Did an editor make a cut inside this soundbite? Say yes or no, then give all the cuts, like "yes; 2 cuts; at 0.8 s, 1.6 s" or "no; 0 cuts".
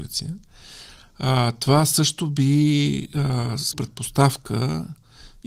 yes; 1 cut; at 3.7 s